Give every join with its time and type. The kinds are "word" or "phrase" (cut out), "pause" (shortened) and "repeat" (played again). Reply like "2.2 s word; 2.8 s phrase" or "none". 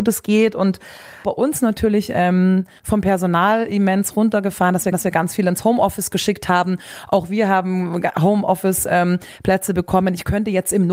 1.2 s phrase; 4.9 s repeat